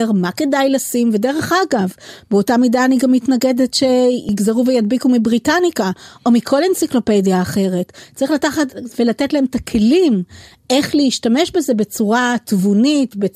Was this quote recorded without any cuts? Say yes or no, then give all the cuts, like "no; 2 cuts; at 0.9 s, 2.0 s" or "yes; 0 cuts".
yes; 0 cuts